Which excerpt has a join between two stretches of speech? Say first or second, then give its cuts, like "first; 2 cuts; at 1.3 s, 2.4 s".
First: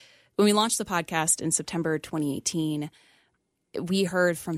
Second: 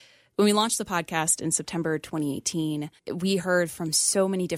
second; 1 cut; at 3.0 s